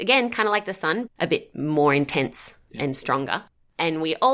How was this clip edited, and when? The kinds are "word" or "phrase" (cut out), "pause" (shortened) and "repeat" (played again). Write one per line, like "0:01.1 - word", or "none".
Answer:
0:01.1 - word